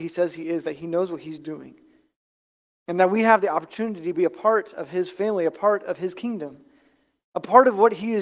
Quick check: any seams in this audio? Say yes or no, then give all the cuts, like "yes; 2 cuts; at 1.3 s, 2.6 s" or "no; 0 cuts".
no; 0 cuts